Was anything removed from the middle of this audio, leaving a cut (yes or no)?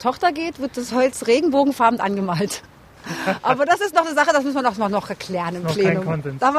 no